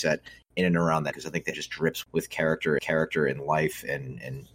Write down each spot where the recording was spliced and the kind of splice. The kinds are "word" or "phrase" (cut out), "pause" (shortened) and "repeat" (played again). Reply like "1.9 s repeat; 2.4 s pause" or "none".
1.1 s word; 1.5 s word; 2.0 s word; 2.8 s repeat